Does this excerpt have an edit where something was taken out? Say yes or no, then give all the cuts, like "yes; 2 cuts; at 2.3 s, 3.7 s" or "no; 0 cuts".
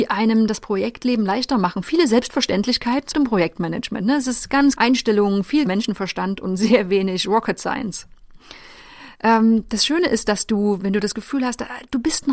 yes; 3 cuts; at 3.1 s, 4.8 s, 5.7 s